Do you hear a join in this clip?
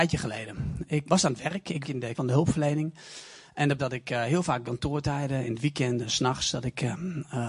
yes; 5 cuts; at 1.1 s, 1.8 s, 2.1 s, 3.8 s, 4.6 s

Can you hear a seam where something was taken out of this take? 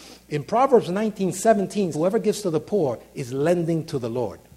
yes; 1 cut; at 1.9 s

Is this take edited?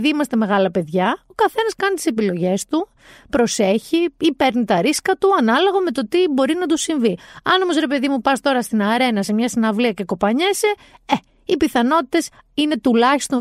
no; 0 cuts

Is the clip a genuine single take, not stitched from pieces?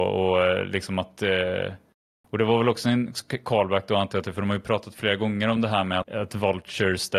no; 1 cut; at 6.0 s

